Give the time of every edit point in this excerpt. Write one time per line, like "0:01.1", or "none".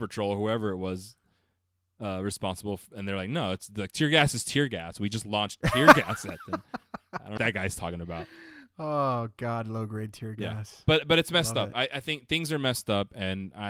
0:07.4